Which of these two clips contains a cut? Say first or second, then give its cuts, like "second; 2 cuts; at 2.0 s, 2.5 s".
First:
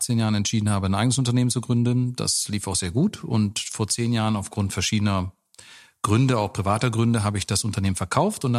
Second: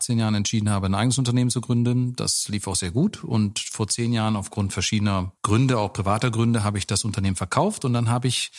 second; 1 cut; at 5.4 s